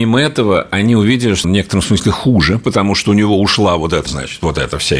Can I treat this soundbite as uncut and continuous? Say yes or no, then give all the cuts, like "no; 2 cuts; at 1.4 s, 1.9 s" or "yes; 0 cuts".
no; 2 cuts; at 1.4 s, 4.1 s